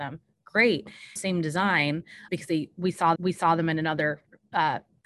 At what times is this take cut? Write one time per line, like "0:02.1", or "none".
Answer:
0:01.2
0:02.3
0:03.2